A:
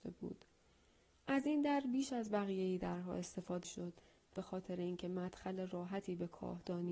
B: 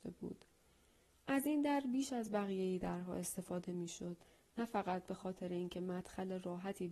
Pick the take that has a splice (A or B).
A